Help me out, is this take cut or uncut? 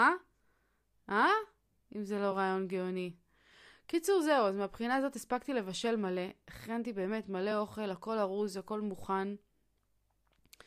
uncut